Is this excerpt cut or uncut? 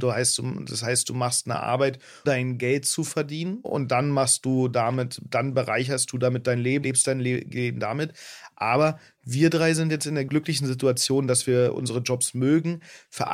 cut